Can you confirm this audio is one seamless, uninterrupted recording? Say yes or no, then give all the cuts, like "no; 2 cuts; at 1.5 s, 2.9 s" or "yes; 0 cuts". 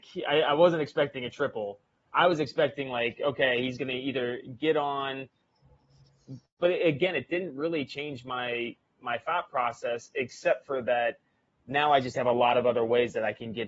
yes; 0 cuts